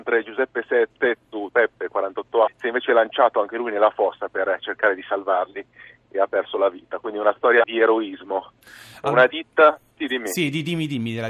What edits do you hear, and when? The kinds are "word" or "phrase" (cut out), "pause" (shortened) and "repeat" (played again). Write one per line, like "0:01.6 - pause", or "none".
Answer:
0:01.5 - word
0:02.5 - word
0:07.6 - word